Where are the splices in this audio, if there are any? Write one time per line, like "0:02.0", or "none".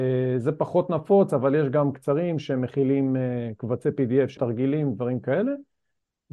0:01.9
0:04.4